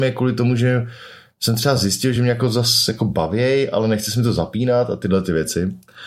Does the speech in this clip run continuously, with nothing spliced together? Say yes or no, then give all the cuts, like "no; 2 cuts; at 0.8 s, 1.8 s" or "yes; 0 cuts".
yes; 0 cuts